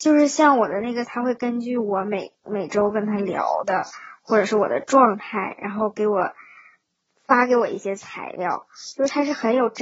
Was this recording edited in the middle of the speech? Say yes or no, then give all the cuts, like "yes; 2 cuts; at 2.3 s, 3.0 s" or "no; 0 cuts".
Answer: yes; 1 cut; at 1.0 s